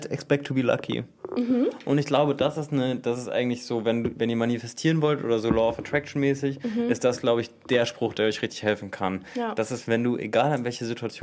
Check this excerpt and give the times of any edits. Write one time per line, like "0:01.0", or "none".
none